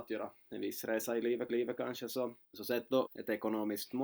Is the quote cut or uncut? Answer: cut